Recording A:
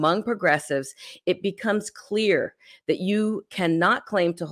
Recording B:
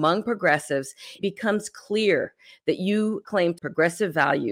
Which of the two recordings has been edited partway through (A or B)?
B